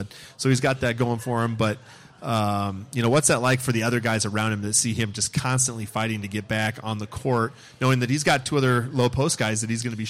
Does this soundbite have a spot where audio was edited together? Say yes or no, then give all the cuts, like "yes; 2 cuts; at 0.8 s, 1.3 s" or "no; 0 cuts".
no; 0 cuts